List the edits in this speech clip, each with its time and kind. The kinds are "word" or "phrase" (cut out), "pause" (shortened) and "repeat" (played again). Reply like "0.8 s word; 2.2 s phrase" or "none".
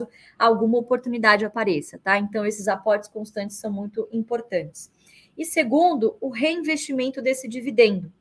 none